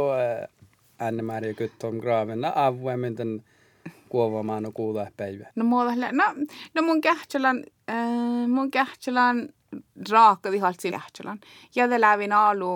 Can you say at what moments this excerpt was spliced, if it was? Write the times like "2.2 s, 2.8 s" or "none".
5.5 s, 10.9 s

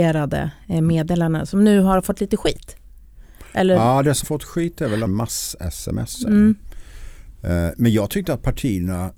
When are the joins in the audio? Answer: 4.2 s, 5.1 s

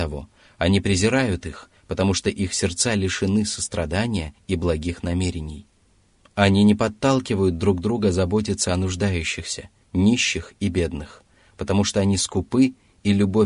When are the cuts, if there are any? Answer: none

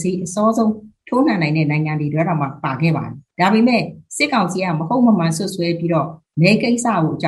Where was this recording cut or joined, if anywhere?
3.3 s

